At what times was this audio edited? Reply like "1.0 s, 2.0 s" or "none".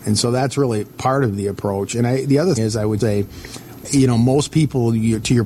2.6 s, 3.0 s